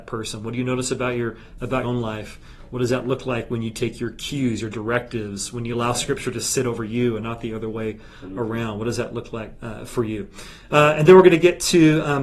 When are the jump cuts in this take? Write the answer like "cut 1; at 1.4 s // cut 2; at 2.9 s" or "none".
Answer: cut 1; at 1.8 s